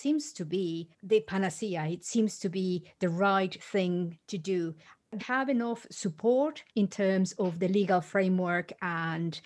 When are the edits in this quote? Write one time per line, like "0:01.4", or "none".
0:00.9
0:04.2
0:05.2
0:06.7